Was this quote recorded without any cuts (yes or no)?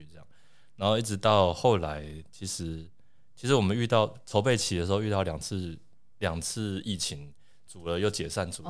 yes